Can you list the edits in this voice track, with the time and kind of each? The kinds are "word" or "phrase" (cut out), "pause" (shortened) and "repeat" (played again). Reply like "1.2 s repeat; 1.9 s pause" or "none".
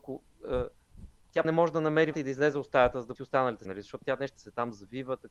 1.4 s word; 2.1 s word; 3.2 s word; 3.6 s word; 4.4 s word